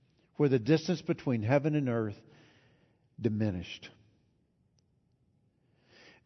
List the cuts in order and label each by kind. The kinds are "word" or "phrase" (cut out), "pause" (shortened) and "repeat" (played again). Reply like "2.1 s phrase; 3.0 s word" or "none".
none

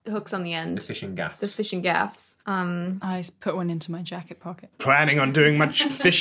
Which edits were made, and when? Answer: 2.4 s pause

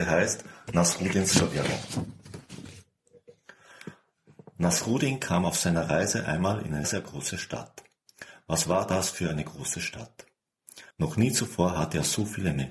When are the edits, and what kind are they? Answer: 6.8 s word; 10.9 s pause

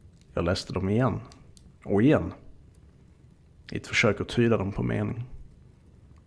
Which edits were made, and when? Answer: none

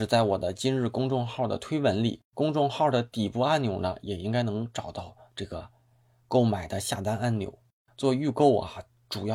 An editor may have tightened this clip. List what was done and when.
2.2 s pause

